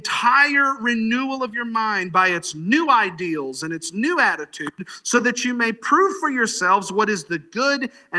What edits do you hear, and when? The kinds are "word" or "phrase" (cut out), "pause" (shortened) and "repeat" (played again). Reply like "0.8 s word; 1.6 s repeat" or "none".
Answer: none